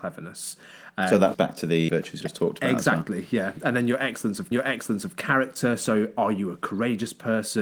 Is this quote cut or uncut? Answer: cut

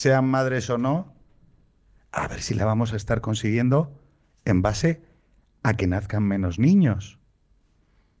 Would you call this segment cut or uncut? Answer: uncut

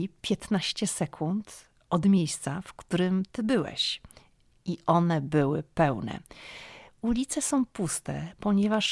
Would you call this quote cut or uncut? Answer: uncut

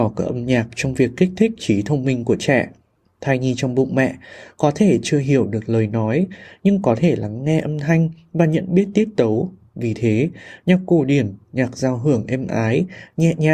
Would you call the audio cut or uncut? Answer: uncut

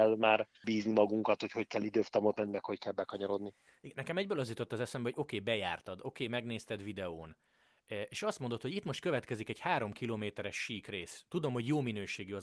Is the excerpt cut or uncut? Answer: uncut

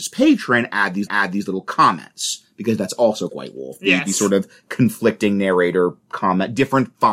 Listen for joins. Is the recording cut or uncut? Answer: cut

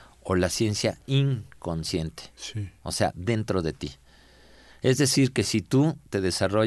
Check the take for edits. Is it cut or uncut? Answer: uncut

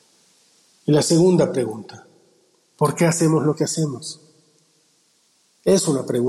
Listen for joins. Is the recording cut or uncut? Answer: uncut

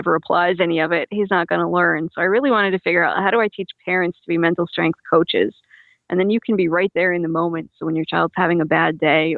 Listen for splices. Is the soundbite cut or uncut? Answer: uncut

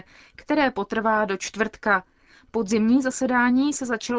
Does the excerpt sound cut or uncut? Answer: uncut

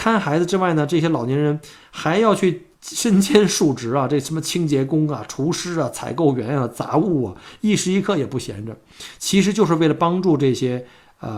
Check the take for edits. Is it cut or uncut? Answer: cut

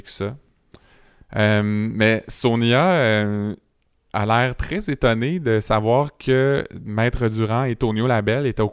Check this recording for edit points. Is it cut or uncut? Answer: uncut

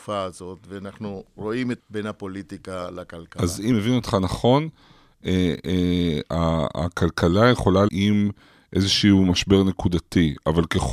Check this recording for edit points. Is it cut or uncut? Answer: cut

